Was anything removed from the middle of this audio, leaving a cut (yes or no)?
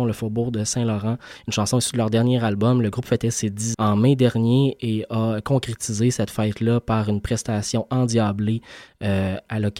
yes